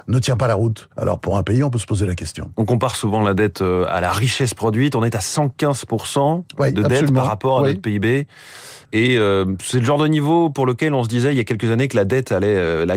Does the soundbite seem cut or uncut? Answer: cut